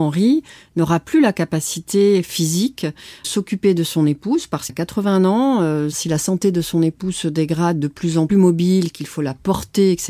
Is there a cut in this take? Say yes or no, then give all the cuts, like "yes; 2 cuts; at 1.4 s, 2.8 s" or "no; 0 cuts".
yes; 3 cuts; at 3.2 s, 4.7 s, 8.3 s